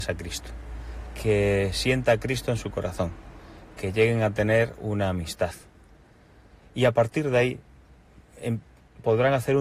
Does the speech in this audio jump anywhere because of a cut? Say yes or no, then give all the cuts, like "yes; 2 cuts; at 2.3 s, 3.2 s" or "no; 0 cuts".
no; 0 cuts